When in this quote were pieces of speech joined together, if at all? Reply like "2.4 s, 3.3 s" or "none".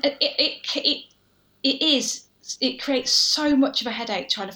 none